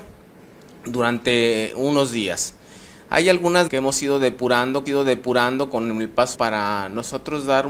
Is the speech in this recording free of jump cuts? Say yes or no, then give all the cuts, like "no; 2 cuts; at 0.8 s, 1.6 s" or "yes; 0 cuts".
no; 3 cuts; at 3.7 s, 4.9 s, 6.3 s